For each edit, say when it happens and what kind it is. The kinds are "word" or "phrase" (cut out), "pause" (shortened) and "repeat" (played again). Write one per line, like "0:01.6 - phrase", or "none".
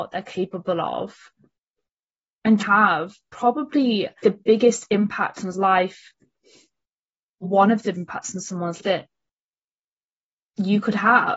0:02.6 - word
0:04.2 - word
0:05.5 - word
0:07.4 - word
0:07.9 - word
0:08.8 - word